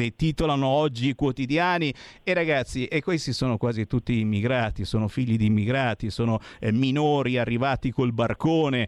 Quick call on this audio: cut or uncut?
uncut